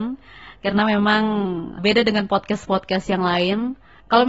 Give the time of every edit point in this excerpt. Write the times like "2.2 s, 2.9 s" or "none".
1.8 s